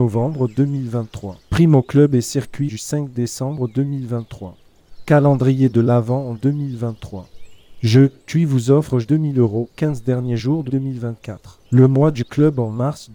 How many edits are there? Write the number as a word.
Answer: seven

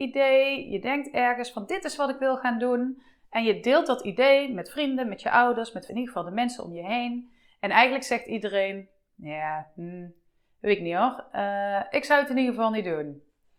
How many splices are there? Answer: one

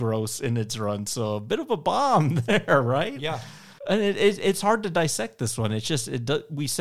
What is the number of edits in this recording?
one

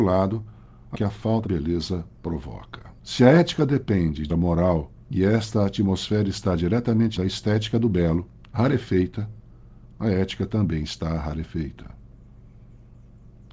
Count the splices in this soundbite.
seven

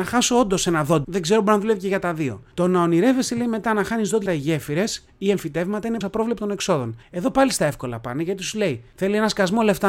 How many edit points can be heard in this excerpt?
three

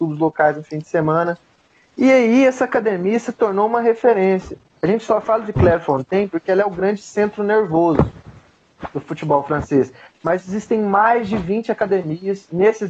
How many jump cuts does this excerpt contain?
zero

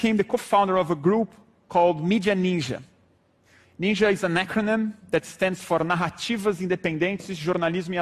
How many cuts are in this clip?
zero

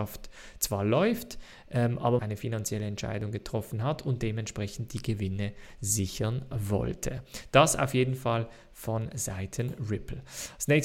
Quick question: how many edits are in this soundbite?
one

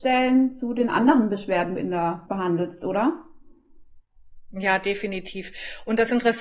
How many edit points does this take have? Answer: two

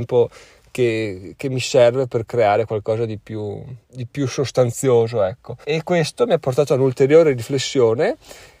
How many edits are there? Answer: two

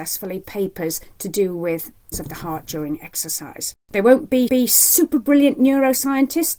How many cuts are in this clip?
two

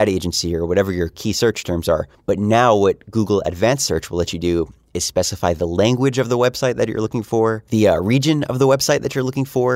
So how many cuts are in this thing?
one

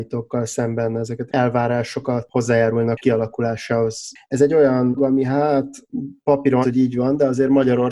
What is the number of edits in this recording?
five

